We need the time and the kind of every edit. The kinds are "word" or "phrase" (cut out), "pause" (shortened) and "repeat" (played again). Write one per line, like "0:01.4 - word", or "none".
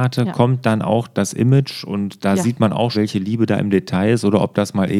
0:02.9 - word